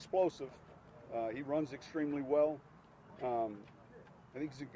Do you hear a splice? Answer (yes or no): no